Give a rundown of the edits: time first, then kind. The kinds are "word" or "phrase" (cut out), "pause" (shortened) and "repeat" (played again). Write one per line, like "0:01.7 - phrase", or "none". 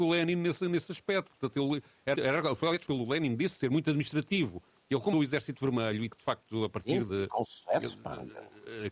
0:02.1 - word
0:02.9 - word
0:05.1 - word
0:06.1 - word
0:07.1 - word